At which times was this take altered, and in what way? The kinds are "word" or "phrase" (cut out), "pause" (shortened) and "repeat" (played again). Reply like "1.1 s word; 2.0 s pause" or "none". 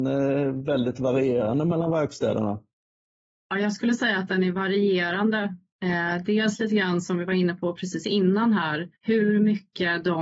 9.0 s pause